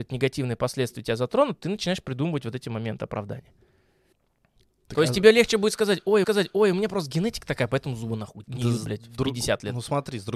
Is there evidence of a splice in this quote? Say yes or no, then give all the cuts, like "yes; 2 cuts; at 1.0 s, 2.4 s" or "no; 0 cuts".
yes; 3 cuts; at 4.1 s, 6.2 s, 8.4 s